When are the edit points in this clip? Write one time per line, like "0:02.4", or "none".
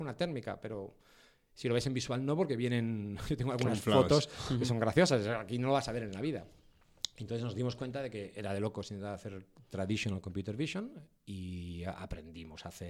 none